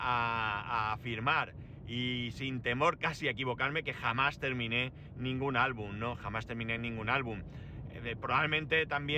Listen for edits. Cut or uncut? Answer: uncut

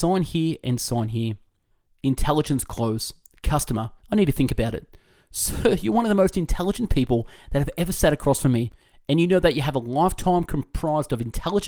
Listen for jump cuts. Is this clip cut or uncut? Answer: cut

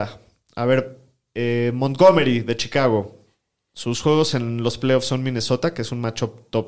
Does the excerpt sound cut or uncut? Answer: uncut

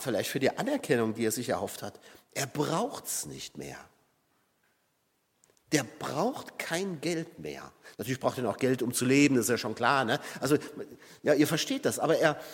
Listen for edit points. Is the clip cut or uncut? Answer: uncut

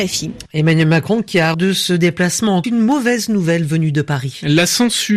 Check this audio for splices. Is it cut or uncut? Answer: cut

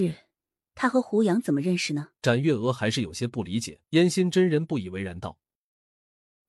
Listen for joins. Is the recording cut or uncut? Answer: cut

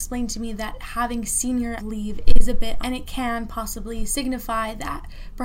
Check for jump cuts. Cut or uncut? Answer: cut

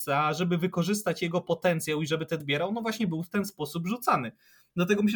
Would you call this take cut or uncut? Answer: cut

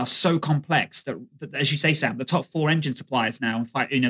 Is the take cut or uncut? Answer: uncut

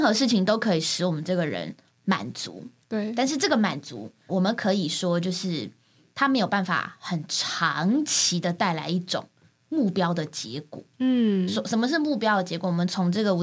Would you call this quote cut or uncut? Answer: cut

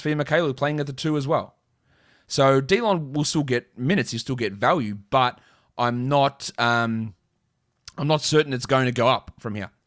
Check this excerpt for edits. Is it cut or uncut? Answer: uncut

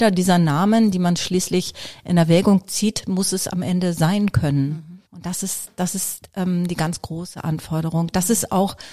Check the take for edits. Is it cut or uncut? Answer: cut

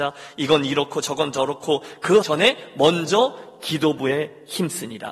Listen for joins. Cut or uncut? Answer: cut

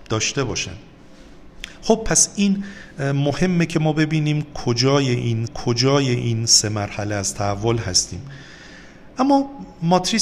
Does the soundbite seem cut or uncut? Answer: cut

